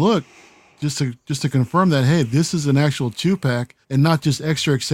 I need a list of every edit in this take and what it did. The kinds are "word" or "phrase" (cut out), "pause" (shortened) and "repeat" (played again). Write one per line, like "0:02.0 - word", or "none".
0:03.8 - pause

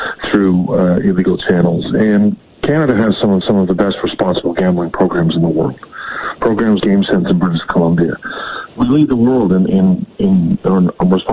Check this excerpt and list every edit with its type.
0:03.4 - repeat
0:06.8 - word
0:09.7 - word

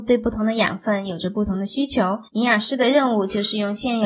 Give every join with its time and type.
0:02.3 - pause

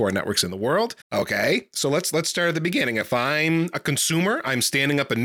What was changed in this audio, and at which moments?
0:01.0 - pause

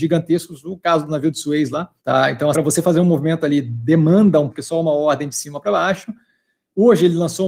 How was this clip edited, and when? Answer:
0:02.0 - pause
0:02.5 - word
0:04.5 - phrase

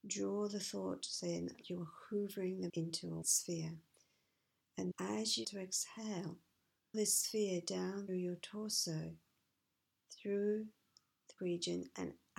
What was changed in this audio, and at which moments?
0:01.6 - word
0:02.7 - word
0:03.2 - word
0:04.9 - word
0:05.4 - word
0:06.9 - word
0:08.1 - word
0:11.4 - word

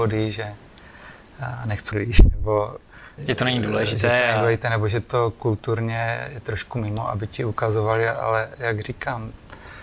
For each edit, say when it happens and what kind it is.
0:01.9 - word
0:03.2 - word

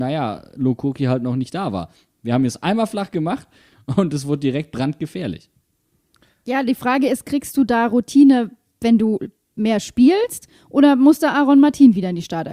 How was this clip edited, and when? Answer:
none

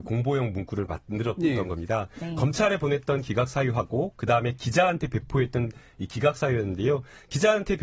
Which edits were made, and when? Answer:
none

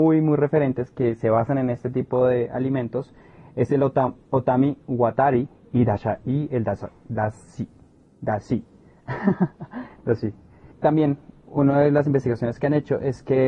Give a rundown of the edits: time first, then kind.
none

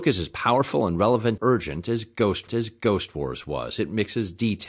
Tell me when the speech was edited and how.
0:01.4 - word
0:02.5 - repeat

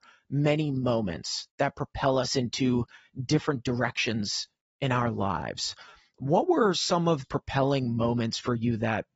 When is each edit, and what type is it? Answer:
0:07.2 - word

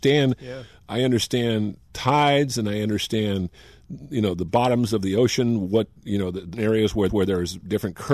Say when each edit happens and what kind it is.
0:06.0 - pause
0:06.5 - word
0:07.1 - repeat

